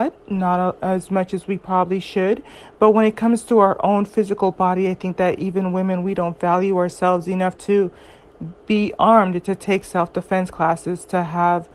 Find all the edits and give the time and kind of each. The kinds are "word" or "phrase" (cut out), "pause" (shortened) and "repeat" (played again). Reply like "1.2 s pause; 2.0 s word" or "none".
none